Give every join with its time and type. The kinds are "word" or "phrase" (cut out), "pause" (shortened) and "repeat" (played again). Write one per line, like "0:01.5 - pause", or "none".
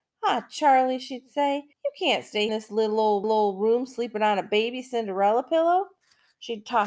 0:01.7 - pause
0:02.5 - phrase
0:03.2 - repeat